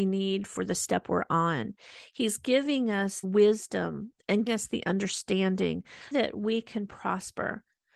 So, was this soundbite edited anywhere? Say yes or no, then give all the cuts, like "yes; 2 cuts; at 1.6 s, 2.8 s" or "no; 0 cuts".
yes; 3 cuts; at 3.2 s, 4.5 s, 6.1 s